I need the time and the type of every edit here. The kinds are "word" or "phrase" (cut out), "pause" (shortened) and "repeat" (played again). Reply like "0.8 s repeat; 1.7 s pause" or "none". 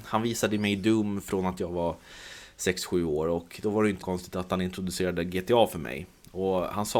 4.0 s word